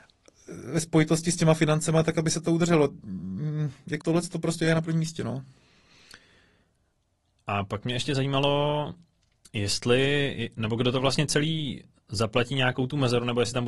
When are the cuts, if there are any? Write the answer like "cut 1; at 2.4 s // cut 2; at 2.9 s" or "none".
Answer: cut 1; at 4.0 s